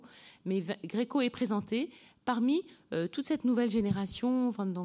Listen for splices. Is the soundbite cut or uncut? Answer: uncut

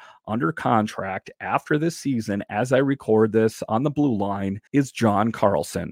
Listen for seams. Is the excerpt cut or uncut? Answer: cut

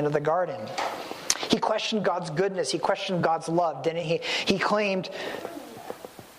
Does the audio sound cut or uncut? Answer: uncut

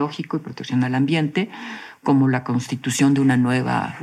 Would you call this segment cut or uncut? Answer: uncut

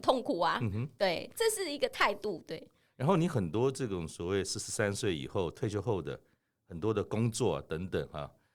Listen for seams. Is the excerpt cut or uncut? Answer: uncut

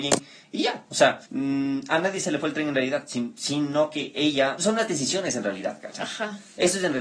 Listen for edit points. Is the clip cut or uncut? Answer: cut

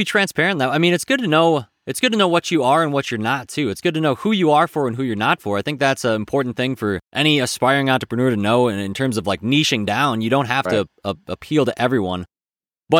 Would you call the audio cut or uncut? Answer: cut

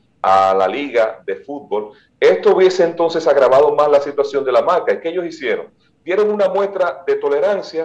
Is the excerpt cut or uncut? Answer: uncut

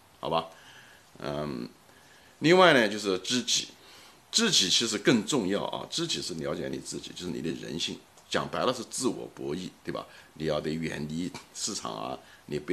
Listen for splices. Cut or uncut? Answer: uncut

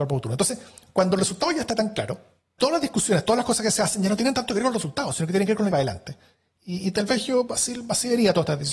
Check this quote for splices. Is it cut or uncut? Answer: cut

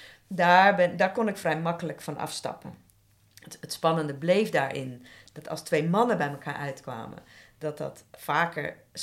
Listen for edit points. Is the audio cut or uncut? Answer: uncut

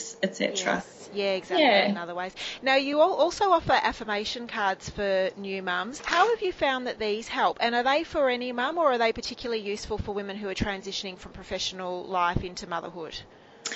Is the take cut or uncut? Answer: uncut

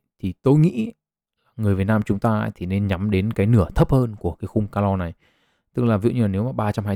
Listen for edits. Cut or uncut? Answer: uncut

